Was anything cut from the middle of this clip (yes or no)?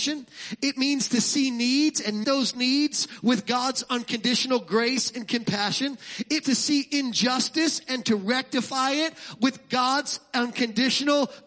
yes